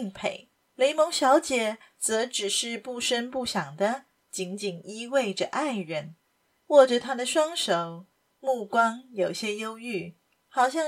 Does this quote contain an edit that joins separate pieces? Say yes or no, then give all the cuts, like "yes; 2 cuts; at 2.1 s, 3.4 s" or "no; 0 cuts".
no; 0 cuts